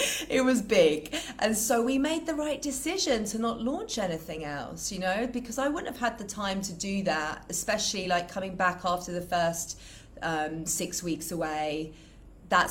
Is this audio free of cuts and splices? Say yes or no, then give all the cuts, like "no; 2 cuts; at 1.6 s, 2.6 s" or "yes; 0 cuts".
yes; 0 cuts